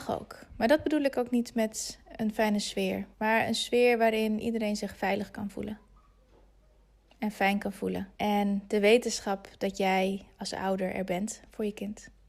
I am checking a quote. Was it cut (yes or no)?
yes